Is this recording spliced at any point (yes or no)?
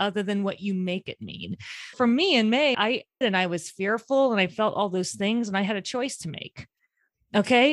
yes